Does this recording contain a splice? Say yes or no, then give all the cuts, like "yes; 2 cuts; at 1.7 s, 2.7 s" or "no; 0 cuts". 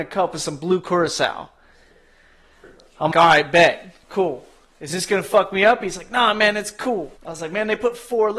yes; 2 cuts; at 3.1 s, 7.2 s